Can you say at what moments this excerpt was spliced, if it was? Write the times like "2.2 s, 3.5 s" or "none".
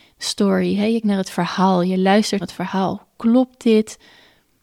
1.0 s, 2.4 s